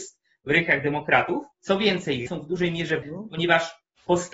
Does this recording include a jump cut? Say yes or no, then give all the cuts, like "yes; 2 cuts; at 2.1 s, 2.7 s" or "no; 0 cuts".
yes; 3 cuts; at 1.5 s, 2.3 s, 3.0 s